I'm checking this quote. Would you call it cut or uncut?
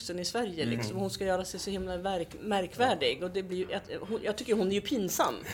uncut